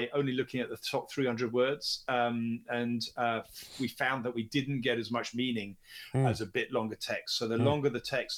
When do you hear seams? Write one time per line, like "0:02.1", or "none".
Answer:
none